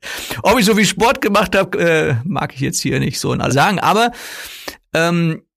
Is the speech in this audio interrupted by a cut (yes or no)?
yes